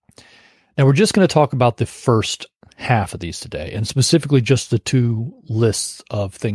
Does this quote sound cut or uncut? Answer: uncut